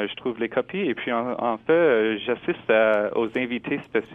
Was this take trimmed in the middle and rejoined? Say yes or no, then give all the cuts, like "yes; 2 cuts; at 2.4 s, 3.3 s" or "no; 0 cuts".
no; 0 cuts